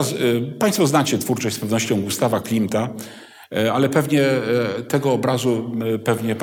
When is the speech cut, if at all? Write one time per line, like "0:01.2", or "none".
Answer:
none